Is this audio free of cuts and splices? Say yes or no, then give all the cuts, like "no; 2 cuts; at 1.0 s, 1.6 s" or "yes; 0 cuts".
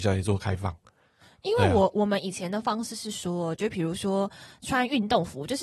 yes; 0 cuts